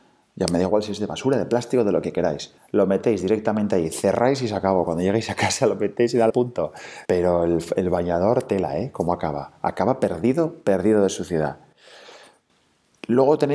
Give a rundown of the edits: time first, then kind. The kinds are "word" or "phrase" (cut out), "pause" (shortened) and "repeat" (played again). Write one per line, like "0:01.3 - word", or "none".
0:02.6 - pause
0:06.3 - phrase
0:07.1 - pause